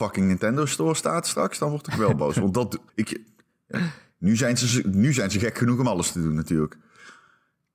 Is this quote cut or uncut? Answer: cut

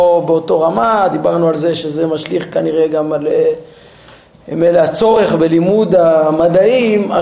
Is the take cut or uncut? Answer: uncut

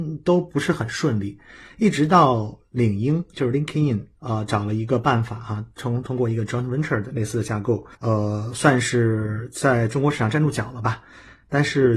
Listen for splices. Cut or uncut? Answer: cut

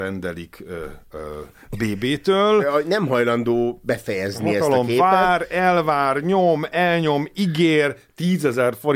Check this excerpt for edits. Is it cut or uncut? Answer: uncut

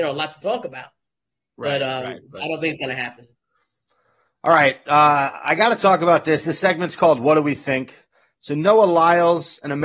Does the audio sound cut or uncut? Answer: uncut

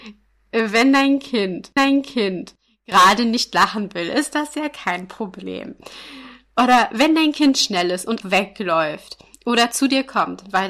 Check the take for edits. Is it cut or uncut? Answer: cut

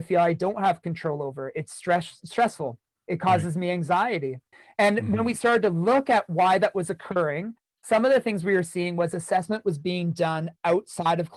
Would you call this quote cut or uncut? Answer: uncut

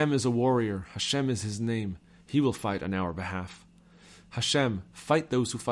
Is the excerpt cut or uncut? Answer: uncut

